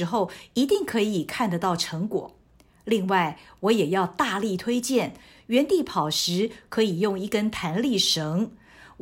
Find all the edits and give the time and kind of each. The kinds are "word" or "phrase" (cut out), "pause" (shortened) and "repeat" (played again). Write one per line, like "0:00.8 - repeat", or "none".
none